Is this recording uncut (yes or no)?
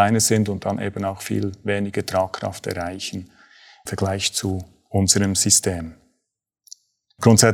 no